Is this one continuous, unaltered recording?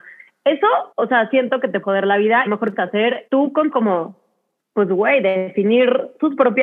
no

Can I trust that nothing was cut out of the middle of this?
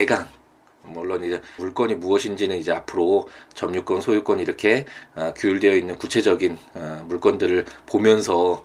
no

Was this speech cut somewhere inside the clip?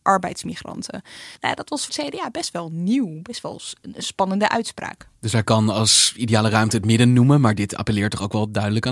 yes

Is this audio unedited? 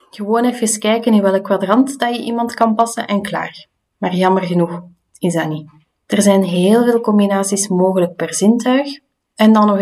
yes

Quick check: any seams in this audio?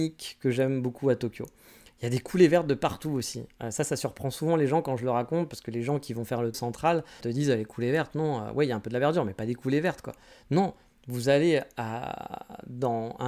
yes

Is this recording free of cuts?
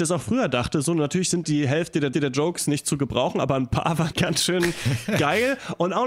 no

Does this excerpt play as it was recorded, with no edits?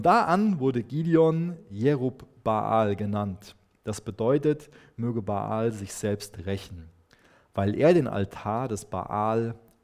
yes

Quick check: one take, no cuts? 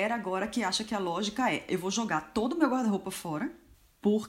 yes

